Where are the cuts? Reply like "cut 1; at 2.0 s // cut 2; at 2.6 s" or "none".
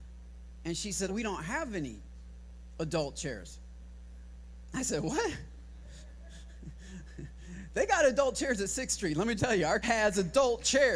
cut 1; at 1.1 s // cut 2; at 9.4 s // cut 3; at 9.8 s